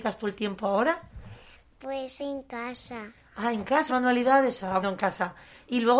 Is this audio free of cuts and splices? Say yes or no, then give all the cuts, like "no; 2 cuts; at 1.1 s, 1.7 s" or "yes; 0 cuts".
no; 3 cuts; at 2.2 s, 3.9 s, 4.8 s